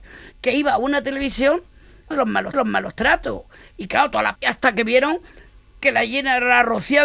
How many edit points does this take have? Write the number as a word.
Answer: three